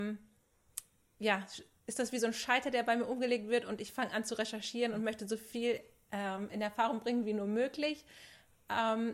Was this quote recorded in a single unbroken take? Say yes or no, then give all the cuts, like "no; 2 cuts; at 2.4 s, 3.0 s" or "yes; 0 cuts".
yes; 0 cuts